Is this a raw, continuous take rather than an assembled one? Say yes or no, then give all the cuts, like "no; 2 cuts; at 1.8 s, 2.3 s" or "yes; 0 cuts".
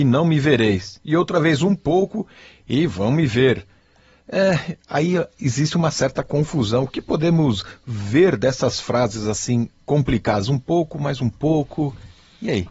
yes; 0 cuts